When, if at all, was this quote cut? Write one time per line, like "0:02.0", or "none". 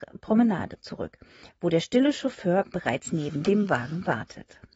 none